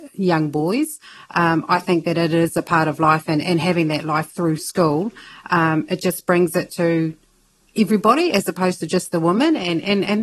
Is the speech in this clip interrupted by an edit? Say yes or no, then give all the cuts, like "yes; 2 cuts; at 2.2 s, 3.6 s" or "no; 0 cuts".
no; 0 cuts